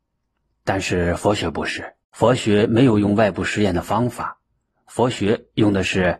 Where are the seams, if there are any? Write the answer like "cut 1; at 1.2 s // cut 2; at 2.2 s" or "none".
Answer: cut 1; at 2.0 s